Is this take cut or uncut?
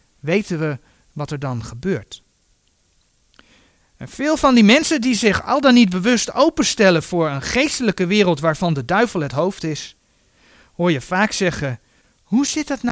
uncut